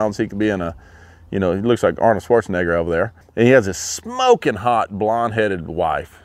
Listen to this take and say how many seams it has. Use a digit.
1